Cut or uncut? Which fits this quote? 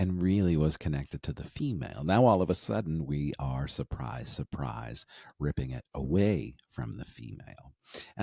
uncut